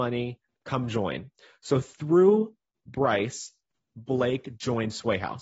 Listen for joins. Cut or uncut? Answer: uncut